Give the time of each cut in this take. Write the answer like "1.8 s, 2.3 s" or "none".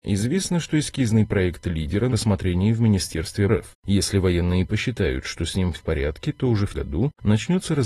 2.1 s, 3.5 s, 5.7 s, 6.7 s